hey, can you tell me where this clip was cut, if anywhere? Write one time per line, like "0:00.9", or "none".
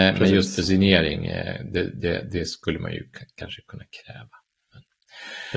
none